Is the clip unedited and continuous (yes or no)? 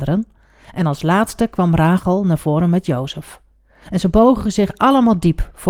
yes